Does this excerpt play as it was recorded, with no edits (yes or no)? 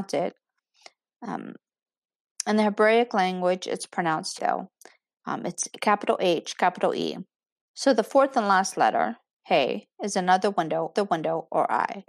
no